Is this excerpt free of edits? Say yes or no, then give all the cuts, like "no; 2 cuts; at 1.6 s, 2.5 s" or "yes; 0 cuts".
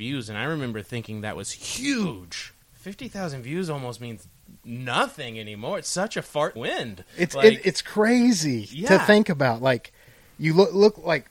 no; 2 cuts; at 2.6 s, 6.6 s